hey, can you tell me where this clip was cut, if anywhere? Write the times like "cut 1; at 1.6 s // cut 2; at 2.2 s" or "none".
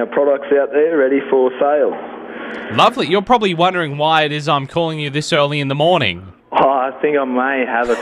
cut 1; at 6.4 s